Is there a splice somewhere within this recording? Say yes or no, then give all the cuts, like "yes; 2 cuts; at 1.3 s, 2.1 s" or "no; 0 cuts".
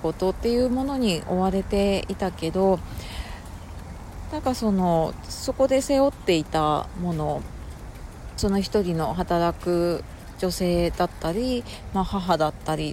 yes; 1 cut; at 8.4 s